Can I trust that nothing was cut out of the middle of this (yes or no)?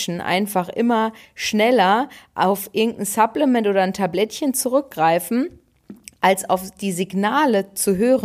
yes